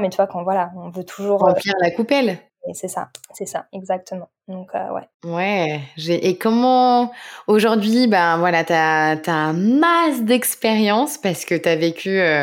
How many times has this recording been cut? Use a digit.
2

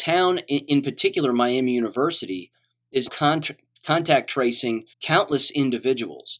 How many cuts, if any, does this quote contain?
2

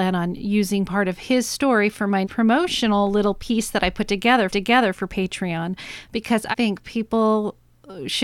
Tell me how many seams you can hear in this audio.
3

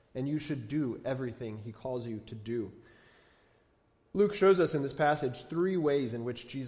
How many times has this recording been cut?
0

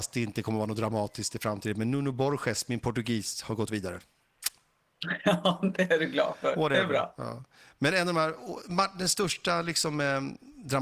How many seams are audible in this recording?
0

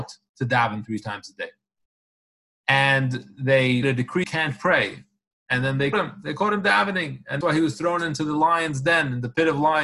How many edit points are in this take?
4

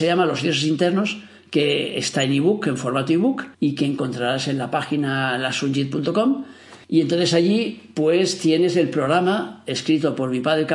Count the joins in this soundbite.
2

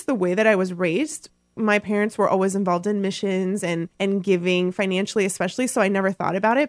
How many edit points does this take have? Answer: 1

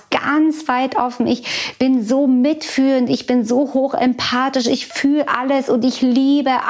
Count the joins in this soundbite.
0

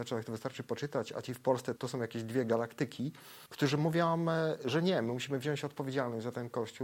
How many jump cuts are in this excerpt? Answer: 2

